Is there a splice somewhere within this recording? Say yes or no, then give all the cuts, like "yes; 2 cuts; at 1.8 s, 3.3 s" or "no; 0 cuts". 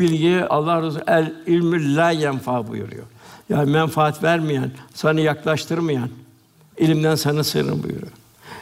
no; 0 cuts